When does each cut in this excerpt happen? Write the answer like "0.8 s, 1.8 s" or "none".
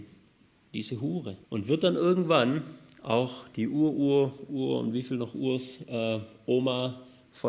1.4 s